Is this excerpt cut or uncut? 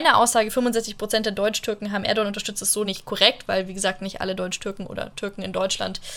uncut